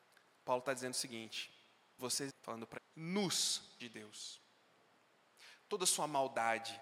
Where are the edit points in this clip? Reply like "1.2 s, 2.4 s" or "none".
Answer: 2.0 s, 2.3 s, 2.8 s, 3.8 s